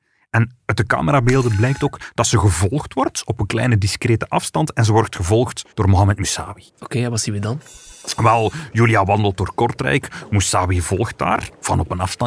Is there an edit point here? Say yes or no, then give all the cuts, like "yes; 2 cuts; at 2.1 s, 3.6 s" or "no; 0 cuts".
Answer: yes; 2 cuts; at 5.7 s, 6.7 s